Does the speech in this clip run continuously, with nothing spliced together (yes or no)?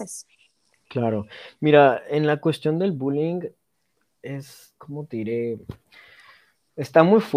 yes